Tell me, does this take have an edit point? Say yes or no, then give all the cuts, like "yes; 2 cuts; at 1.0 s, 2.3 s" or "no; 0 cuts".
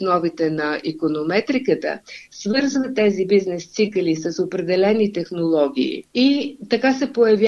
yes; 1 cut; at 6.1 s